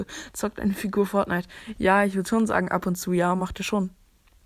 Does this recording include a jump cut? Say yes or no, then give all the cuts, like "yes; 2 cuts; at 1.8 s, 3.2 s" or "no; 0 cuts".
no; 0 cuts